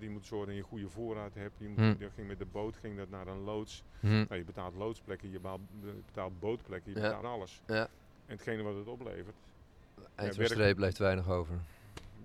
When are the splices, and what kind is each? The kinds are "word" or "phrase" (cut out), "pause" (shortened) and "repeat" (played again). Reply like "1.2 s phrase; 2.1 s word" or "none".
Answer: 7.2 s phrase